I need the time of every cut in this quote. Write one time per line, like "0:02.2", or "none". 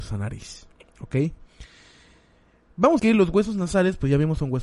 0:03.0